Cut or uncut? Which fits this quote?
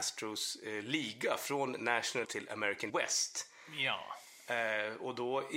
cut